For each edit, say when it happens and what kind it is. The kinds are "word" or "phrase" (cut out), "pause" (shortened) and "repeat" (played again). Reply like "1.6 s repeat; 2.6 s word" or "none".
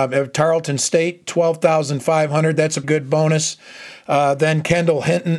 2.8 s word